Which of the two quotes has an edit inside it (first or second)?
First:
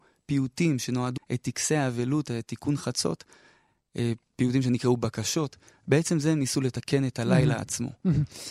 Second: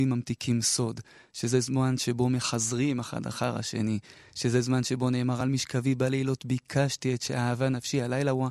first